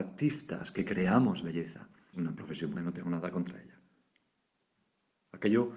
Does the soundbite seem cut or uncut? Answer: cut